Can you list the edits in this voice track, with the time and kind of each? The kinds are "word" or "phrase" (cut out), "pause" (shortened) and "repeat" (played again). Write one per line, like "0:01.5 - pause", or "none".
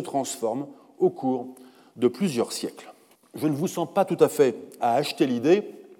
0:03.1 - pause
0:04.8 - word

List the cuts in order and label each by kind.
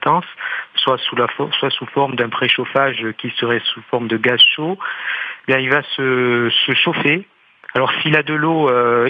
none

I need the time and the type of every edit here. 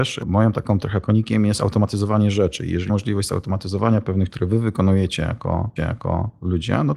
0:01.0 - word
0:02.9 - word
0:04.3 - word
0:05.8 - repeat

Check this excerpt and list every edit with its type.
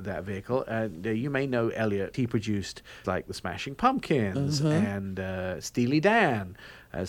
0:02.1 - word
0:03.0 - word

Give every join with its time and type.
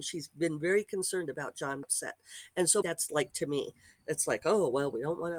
0:01.8 - word
0:02.8 - word
0:03.3 - word

